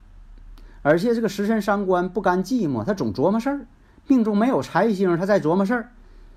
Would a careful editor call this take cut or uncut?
uncut